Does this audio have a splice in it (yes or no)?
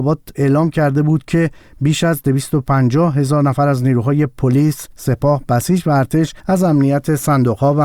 yes